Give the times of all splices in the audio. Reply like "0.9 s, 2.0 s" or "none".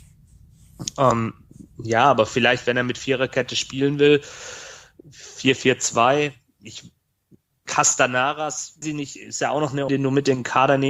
8.8 s, 9.9 s